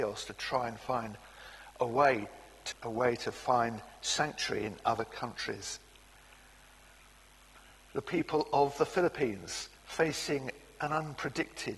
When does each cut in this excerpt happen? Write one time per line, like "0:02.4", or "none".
0:02.7
0:09.8